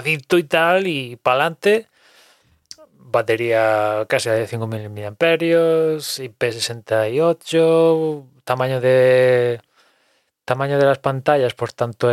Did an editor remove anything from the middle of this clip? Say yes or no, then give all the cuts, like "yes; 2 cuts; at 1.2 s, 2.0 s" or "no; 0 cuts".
no; 0 cuts